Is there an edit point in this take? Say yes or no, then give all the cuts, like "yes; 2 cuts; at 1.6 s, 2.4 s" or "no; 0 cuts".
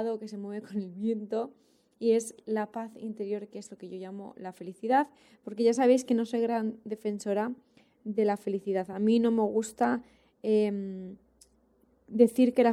no; 0 cuts